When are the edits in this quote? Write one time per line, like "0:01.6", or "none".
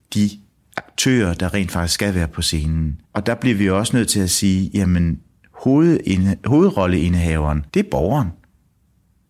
0:03.1
0:07.7